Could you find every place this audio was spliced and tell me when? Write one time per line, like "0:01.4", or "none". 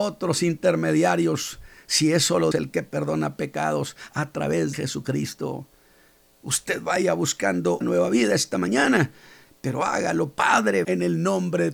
0:02.5
0:04.7
0:07.8
0:10.8